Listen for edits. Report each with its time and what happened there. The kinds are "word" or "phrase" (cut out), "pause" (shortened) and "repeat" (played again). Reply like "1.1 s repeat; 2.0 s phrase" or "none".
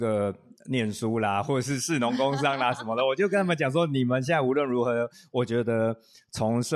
none